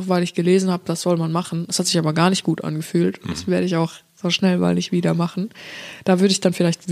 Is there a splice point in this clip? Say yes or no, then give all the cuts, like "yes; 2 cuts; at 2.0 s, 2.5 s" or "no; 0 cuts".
no; 0 cuts